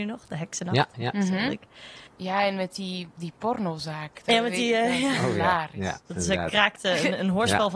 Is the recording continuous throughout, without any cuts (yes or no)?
no